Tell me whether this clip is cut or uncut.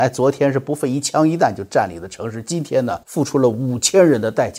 cut